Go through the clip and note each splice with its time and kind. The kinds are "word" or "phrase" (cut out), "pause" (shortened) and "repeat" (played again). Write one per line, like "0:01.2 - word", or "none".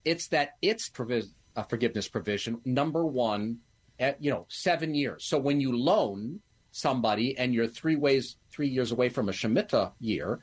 0:00.9 - word
0:02.6 - word
0:03.8 - word